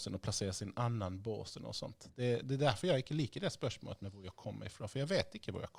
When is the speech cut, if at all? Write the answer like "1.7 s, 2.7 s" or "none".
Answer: none